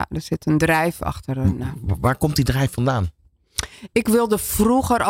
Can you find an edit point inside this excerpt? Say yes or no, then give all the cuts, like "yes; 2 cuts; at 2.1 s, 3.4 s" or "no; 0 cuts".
no; 0 cuts